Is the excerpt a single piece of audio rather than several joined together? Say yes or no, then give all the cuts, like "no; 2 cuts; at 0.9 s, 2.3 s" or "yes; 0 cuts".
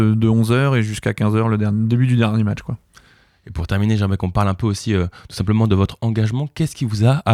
yes; 0 cuts